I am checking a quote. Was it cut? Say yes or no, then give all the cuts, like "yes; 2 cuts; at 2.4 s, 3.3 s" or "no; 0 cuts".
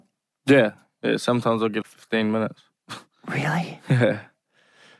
yes; 1 cut; at 1.8 s